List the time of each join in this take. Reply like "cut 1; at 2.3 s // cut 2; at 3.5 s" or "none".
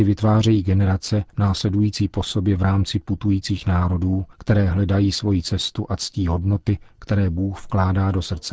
cut 1; at 1.3 s // cut 2; at 4.3 s

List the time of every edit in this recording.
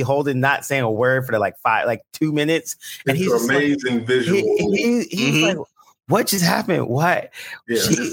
none

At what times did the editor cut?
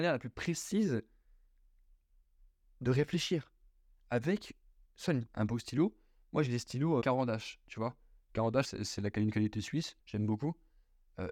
cut 1; at 5.3 s // cut 2; at 7.0 s // cut 3; at 8.6 s // cut 4; at 10.0 s

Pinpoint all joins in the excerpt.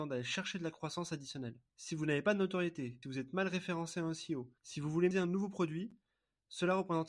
cut 1; at 1.7 s // cut 2; at 3.0 s // cut 3; at 4.6 s // cut 4; at 5.1 s

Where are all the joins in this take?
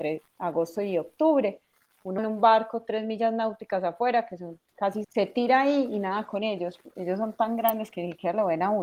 cut 1; at 2.2 s // cut 2; at 5.0 s

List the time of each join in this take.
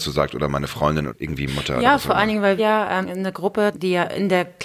cut 1; at 1.1 s // cut 2; at 1.5 s // cut 3; at 2.6 s // cut 4; at 3.0 s // cut 5; at 3.7 s

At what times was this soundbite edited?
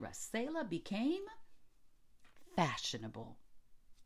none

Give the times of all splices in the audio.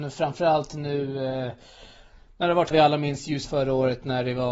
cut 1; at 2.7 s // cut 2; at 3.4 s

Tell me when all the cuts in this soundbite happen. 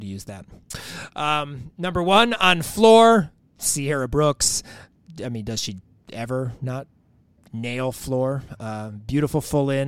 none

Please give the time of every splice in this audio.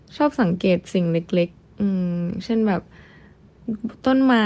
cut 1; at 1.5 s

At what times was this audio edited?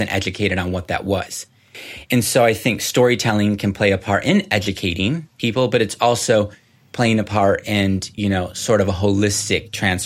none

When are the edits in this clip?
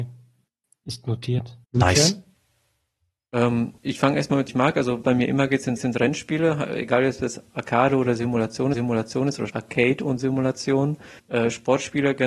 cut 1; at 1.6 s // cut 2; at 3.8 s // cut 3; at 4.5 s // cut 4; at 5.0 s // cut 5; at 5.8 s // cut 6; at 8.7 s // cut 7; at 9.5 s // cut 8; at 11.2 s

